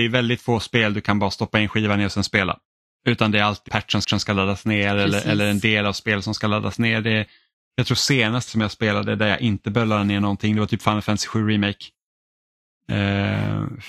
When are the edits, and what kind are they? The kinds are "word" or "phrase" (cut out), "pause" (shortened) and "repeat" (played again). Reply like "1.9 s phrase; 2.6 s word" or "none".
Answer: 3.7 s word; 4.0 s repeat; 8.5 s word